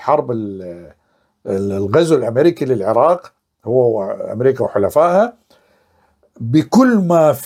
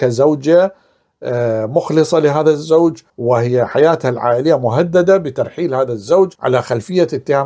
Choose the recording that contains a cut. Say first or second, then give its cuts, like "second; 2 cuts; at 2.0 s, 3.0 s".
second; 2 cuts; at 3.1 s, 6.4 s